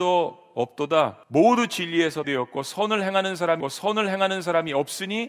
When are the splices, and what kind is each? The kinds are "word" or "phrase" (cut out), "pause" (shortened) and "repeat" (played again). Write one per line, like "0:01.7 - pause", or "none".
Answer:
0:01.2 - pause
0:02.2 - phrase
0:03.6 - repeat